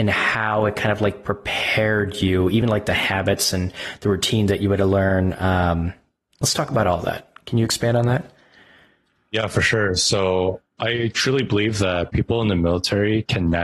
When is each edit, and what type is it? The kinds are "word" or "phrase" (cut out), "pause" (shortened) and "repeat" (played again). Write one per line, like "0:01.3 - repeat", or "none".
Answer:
none